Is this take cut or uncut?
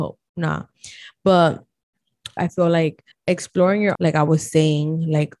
cut